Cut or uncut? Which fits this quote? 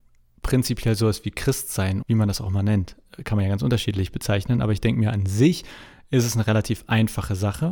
cut